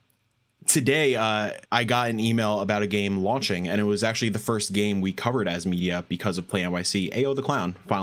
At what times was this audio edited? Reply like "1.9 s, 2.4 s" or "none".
1.6 s